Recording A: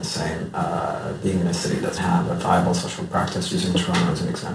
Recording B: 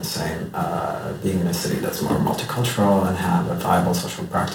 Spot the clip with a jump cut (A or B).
A